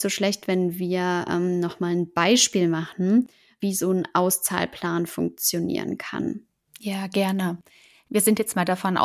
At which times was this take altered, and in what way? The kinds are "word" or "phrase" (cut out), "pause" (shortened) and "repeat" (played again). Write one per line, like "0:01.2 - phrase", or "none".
none